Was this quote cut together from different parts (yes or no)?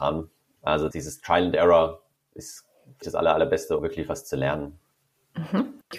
yes